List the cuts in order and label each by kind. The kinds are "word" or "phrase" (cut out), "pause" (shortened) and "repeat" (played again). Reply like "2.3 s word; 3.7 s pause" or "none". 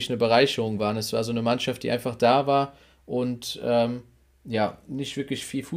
none